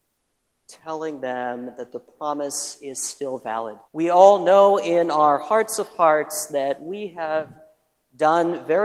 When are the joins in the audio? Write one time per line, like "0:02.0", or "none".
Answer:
0:03.9

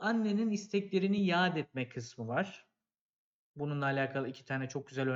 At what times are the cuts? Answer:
none

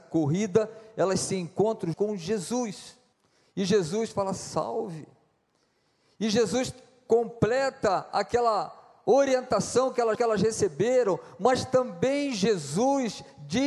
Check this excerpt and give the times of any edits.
0:01.9
0:03.1
0:10.1

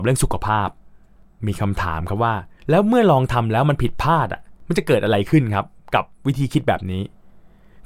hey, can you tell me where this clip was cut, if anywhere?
0:02.6

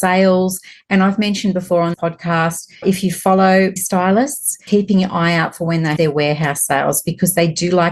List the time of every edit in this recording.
0:01.9
0:02.8
0:03.8
0:04.7
0:06.0

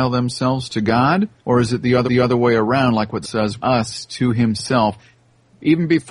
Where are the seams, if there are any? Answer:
0:01.4
0:02.0
0:03.2
0:03.6

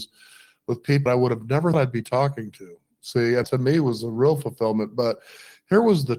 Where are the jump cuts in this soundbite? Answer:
0:01.1
0:01.7
0:03.4

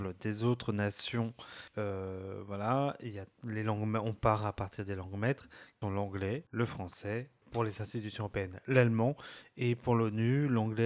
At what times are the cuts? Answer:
0:01.7
0:05.8
0:06.5
0:07.4

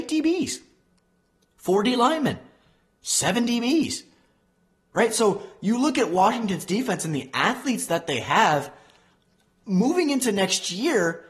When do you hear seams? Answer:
none

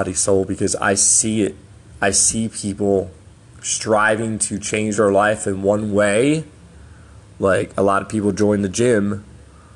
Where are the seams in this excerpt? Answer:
none

